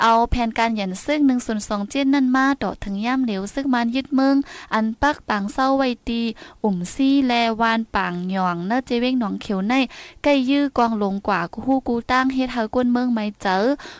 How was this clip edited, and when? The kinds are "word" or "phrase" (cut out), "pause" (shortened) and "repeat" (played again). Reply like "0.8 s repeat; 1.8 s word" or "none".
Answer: none